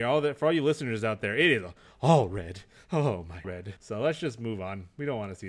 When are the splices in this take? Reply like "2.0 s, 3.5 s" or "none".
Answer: 3.4 s, 3.8 s